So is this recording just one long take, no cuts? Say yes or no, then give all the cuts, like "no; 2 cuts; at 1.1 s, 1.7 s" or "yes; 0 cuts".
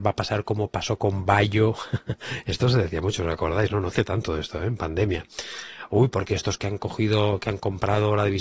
yes; 0 cuts